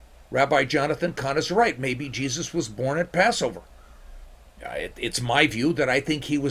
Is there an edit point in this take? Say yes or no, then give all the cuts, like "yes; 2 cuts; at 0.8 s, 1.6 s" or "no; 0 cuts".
yes; 1 cut; at 4.5 s